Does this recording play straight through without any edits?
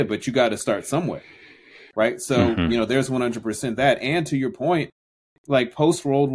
yes; 0 cuts

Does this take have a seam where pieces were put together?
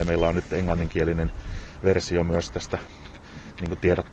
no; 0 cuts

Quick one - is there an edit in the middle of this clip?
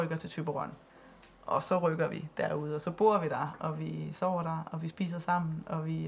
no; 0 cuts

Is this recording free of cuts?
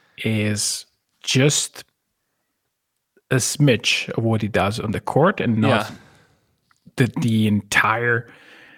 yes; 0 cuts

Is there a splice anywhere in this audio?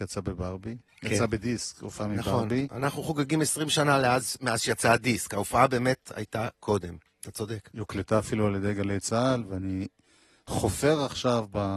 no; 0 cuts

